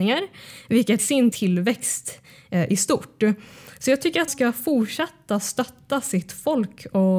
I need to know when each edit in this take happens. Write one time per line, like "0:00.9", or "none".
0:01.0
0:01.3
0:04.3